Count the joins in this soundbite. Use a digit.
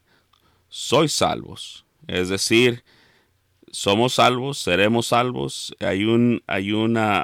0